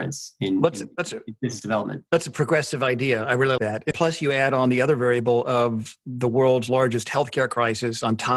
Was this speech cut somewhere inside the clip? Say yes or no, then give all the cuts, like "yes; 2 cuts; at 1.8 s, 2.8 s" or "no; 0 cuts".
yes; 3 cuts; at 2.1 s, 3.6 s, 3.9 s